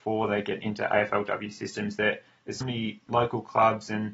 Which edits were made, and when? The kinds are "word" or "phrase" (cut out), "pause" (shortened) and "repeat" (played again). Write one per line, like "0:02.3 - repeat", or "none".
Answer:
0:02.6 - word
0:03.1 - word